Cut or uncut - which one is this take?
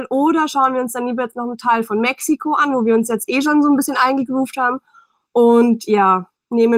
uncut